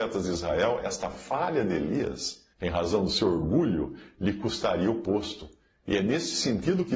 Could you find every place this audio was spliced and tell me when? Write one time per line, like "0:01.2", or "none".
0:02.5

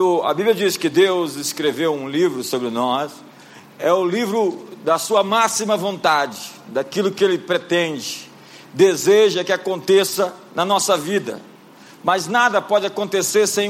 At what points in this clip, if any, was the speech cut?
none

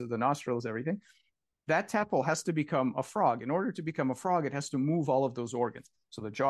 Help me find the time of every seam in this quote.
none

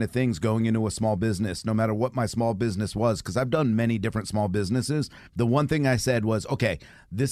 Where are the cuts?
0:05.3

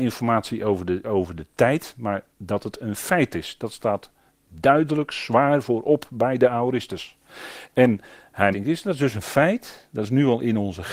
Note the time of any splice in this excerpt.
0:01.0
0:02.3
0:08.5

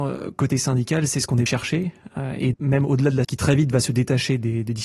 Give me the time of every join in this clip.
0:01.5
0:02.5
0:03.2

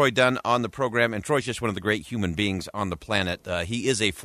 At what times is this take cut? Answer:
none

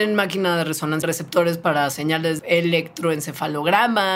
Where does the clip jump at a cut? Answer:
0:01.0
0:02.4

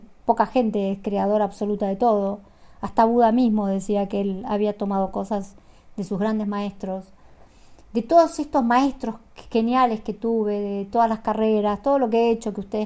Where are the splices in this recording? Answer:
none

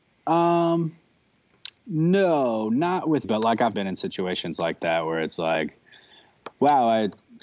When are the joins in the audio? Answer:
0:03.2
0:03.7

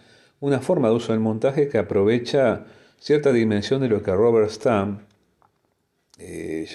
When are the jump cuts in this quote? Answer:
none

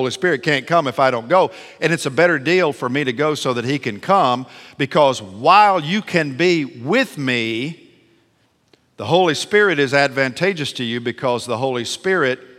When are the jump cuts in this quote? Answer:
none

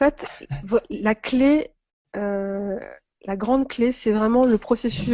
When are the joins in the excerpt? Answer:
none

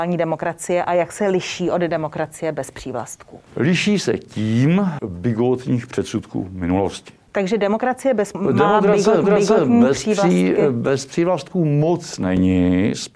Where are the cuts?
0:03.5
0:05.0
0:08.3
0:09.2

